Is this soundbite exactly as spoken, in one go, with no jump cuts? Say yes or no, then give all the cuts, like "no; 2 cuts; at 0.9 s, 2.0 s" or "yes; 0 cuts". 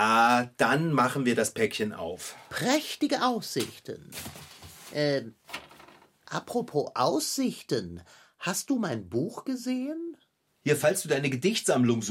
yes; 0 cuts